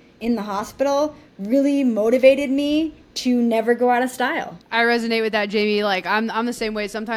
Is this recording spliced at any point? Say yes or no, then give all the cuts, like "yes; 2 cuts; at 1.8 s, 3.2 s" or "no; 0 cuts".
yes; 1 cut; at 4.6 s